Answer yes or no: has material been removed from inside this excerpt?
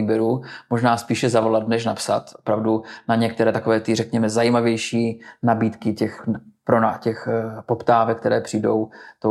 no